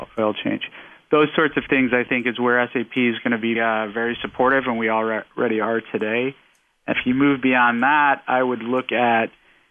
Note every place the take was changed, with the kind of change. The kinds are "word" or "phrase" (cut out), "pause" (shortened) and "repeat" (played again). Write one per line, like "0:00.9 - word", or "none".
0:03.6 - word
0:06.9 - word